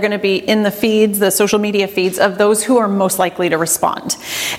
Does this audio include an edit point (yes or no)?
no